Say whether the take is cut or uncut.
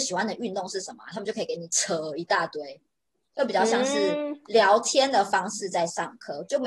uncut